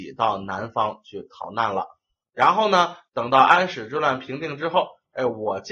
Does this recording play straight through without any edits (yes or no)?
yes